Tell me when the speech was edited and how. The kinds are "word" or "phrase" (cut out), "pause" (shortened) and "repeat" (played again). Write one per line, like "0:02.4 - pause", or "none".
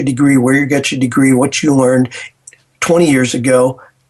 none